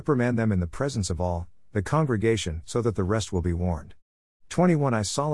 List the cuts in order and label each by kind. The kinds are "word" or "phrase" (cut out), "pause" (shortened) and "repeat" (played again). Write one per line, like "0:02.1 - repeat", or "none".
none